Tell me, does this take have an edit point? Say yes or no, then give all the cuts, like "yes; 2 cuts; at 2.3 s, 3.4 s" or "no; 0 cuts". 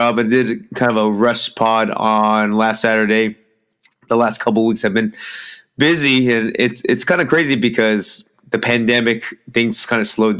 yes; 1 cut; at 8.3 s